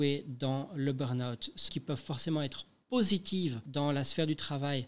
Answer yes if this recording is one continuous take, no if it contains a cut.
no